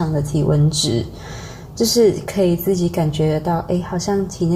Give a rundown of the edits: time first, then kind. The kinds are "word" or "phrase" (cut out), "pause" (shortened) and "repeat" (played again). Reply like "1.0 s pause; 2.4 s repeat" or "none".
none